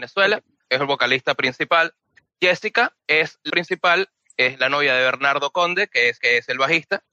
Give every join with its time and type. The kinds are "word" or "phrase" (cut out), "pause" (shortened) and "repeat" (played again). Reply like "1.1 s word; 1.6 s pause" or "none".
3.0 s pause; 3.5 s word; 6.2 s repeat